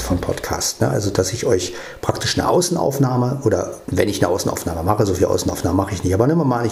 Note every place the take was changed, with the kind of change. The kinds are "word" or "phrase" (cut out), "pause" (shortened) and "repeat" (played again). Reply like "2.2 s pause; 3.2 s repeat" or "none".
3.8 s pause